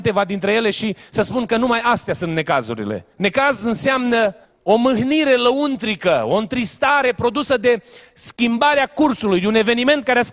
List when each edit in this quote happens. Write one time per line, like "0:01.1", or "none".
0:03.1
0:04.4

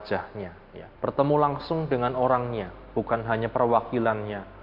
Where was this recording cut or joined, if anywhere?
0:00.9

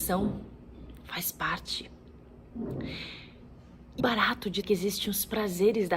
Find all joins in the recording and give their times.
0:04.0
0:04.6

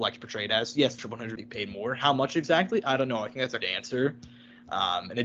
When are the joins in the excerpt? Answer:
0:01.0
0:01.4
0:03.6

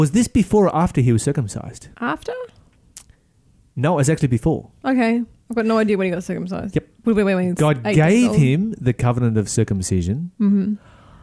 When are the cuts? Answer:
0:01.9
0:06.9

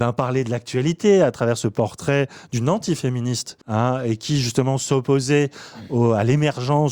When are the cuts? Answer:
0:03.6

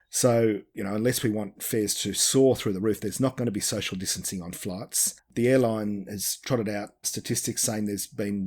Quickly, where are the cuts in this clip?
0:07.0

